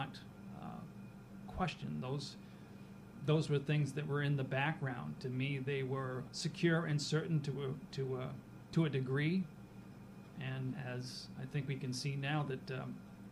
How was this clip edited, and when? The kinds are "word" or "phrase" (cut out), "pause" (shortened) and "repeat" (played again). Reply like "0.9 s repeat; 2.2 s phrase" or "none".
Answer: 6.3 s word; 10.7 s word